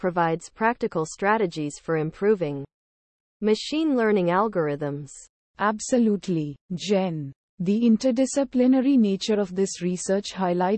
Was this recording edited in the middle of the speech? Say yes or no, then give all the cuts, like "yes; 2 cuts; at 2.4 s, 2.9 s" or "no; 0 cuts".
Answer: yes; 1 cut; at 6.6 s